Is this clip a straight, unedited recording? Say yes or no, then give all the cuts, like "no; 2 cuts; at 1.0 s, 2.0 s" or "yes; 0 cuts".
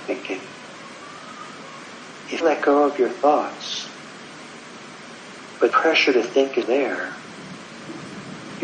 no; 3 cuts; at 2.4 s, 5.7 s, 6.6 s